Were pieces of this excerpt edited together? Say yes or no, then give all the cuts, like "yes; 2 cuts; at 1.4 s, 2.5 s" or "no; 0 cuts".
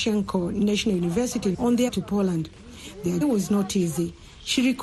yes; 3 cuts; at 1.5 s, 1.9 s, 3.2 s